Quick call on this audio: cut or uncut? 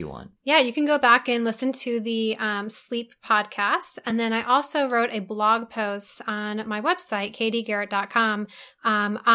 uncut